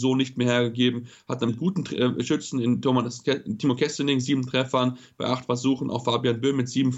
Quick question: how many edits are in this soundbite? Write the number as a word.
one